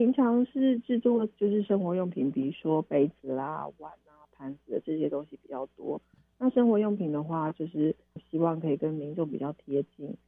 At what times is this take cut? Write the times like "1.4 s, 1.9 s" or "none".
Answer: 8.2 s